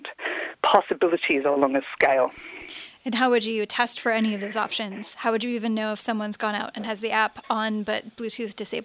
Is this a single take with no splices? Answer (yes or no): yes